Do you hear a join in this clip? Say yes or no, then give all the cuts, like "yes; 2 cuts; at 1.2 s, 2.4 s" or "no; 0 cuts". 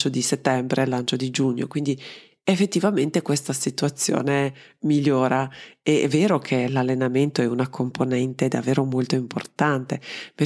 no; 0 cuts